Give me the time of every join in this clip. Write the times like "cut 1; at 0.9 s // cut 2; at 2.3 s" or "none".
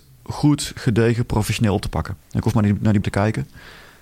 cut 1; at 2.2 s // cut 2; at 3.0 s